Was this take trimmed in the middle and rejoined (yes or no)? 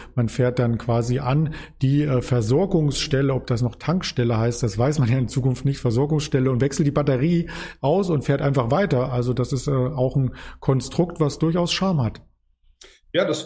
no